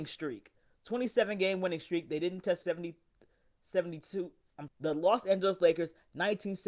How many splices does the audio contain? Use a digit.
2